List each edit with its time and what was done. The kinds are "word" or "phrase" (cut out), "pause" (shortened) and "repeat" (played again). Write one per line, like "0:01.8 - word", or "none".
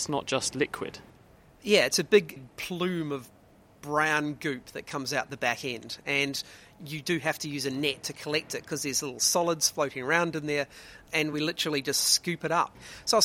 none